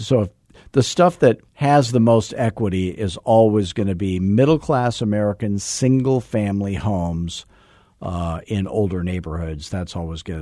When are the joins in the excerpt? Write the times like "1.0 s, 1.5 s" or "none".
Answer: 1.5 s